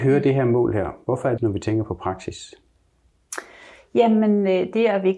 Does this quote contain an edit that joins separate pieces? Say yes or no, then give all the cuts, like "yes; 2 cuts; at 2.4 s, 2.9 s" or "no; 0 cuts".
yes; 1 cut; at 1.4 s